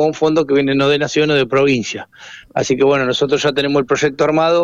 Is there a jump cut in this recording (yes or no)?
no